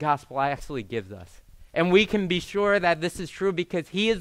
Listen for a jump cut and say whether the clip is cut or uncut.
cut